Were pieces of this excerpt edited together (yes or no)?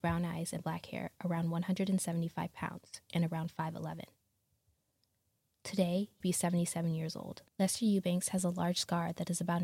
yes